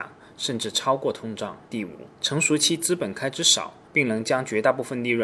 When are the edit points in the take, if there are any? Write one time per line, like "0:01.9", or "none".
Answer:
0:01.6
0:02.2
0:03.8